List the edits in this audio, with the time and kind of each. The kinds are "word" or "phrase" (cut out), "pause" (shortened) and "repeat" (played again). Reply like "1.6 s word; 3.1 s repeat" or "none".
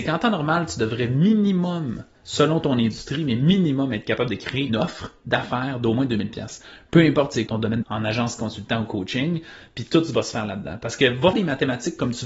4.7 s word; 7.5 s word; 7.8 s word; 11.3 s word